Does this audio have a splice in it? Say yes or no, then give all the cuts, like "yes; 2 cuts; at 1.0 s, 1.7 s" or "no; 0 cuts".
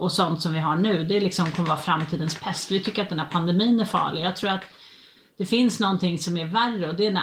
no; 0 cuts